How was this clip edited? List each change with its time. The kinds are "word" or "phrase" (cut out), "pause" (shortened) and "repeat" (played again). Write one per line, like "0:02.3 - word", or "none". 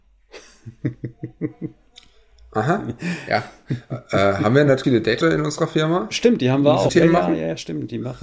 0:04.8 - word
0:05.2 - word
0:06.9 - word